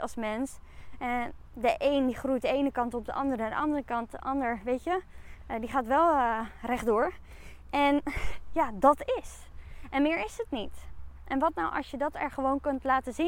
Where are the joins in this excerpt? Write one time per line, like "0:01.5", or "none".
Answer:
none

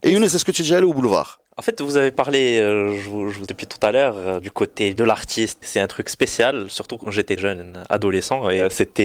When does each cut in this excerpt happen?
0:01.5
0:03.5
0:05.6
0:07.4

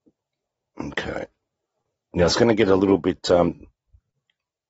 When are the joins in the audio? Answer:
none

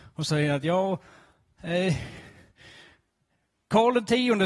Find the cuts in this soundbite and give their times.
none

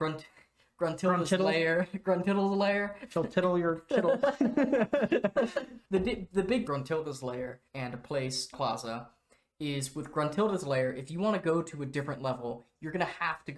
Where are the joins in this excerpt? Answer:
0:05.8
0:06.7
0:07.7
0:08.5

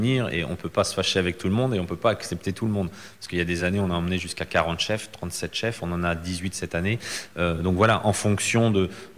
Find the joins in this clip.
none

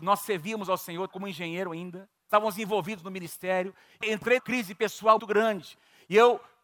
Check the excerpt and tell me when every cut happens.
0:01.1
0:02.3
0:04.0
0:04.4
0:05.2

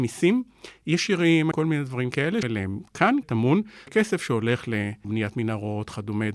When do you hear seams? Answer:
0:01.5
0:02.4
0:03.2
0:03.9
0:05.0

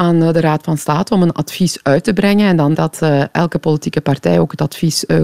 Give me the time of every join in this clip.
0:02.7

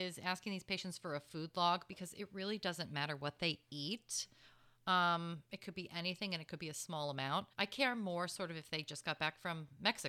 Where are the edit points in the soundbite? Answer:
0:07.5

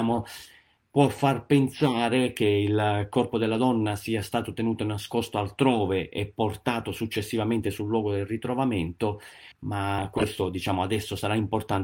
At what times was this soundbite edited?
0:09.5

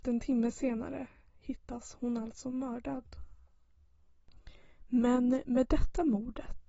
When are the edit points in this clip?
none

